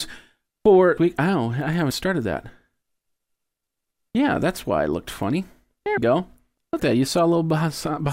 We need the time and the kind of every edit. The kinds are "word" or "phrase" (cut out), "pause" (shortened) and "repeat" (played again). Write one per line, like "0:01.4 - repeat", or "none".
0:01.0 - word
0:01.9 - word
0:06.0 - word
0:06.8 - word